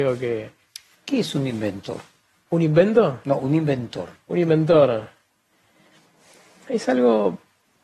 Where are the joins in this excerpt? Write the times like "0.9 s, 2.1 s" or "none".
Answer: none